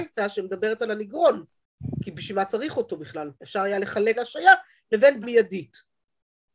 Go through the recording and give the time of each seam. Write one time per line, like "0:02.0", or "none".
0:03.4
0:04.1
0:05.2

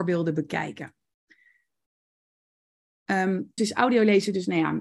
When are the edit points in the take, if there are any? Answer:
0:03.6

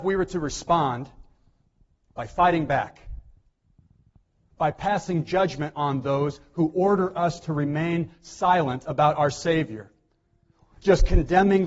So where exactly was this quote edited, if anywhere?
none

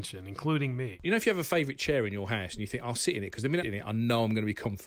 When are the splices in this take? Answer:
0:03.6

